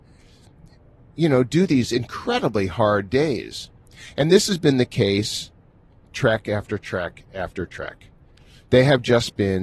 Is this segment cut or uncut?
uncut